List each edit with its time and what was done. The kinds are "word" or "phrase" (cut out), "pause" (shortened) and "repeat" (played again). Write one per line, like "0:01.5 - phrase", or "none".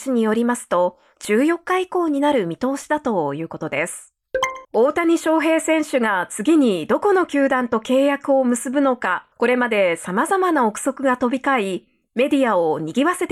0:04.6 - pause
0:09.3 - pause